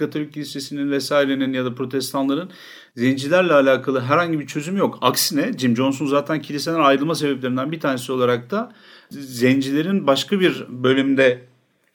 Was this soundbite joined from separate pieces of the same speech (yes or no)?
no